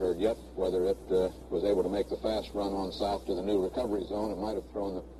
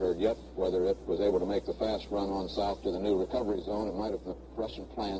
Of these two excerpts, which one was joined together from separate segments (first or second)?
second